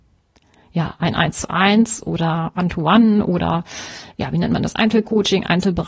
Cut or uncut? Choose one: uncut